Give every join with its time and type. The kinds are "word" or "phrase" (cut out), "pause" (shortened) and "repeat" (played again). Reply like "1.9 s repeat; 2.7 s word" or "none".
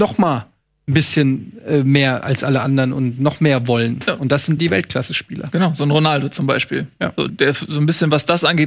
2.2 s word; 4.6 s word; 7.3 s word

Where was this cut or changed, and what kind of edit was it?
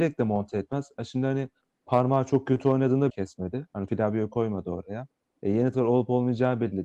3.1 s word; 3.9 s word; 5.7 s word

